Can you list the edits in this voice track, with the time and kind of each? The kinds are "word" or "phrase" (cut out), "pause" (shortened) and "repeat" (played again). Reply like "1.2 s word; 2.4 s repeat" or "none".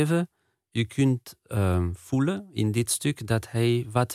none

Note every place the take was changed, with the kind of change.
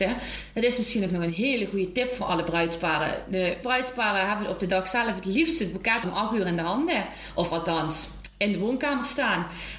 3.6 s word; 6.0 s word

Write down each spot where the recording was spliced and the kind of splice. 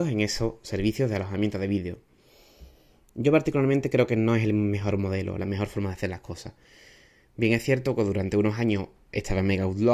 none

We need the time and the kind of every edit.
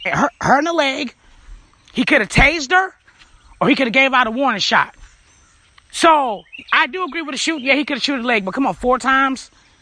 none

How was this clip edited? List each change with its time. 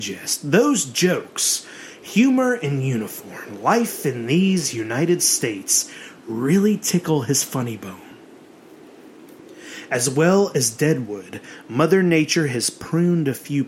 none

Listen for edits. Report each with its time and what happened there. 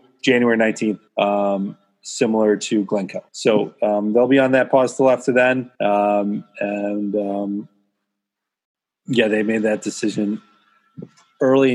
1.1 s pause; 3.3 s pause; 5.7 s pause

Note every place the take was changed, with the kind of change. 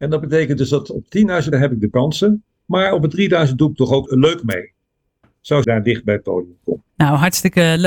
1.5 s word; 1.9 s word; 4.1 s word; 5.6 s phrase; 6.9 s pause

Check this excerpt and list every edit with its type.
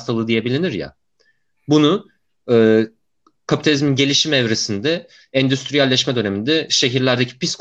none

